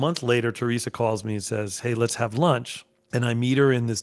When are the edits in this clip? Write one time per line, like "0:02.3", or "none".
none